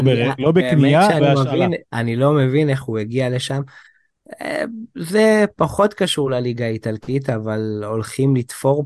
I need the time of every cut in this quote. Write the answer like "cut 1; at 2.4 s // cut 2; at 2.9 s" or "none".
cut 1; at 1.2 s // cut 2; at 1.9 s